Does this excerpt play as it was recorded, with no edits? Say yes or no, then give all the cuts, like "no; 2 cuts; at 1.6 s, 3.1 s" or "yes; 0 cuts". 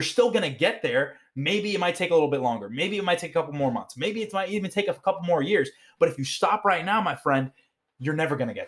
yes; 0 cuts